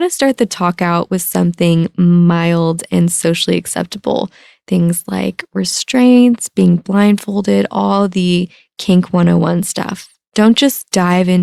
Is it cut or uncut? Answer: uncut